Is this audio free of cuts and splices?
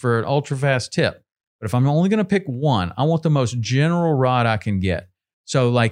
yes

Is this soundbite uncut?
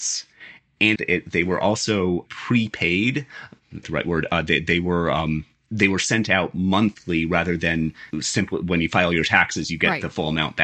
no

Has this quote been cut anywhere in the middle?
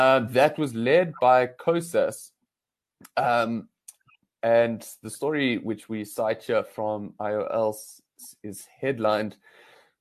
no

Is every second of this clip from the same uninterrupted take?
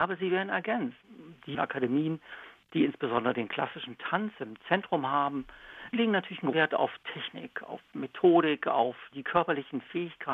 no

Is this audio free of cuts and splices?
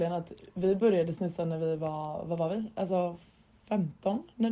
yes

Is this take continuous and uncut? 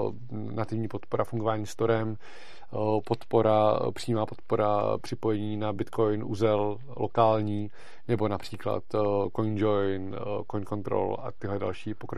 yes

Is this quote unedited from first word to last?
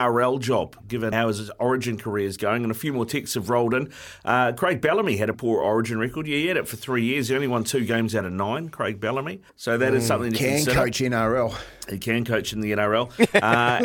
no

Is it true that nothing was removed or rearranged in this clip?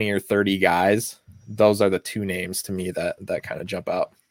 yes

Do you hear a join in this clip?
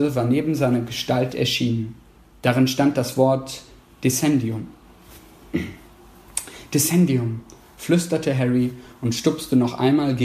no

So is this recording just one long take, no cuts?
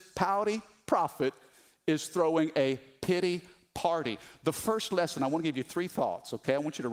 yes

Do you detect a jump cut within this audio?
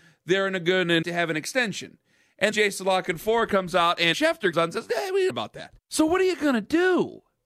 yes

